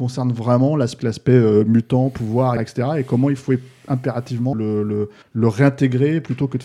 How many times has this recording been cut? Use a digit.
4